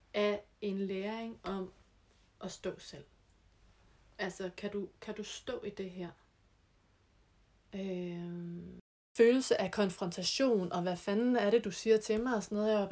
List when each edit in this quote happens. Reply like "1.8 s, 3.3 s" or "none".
none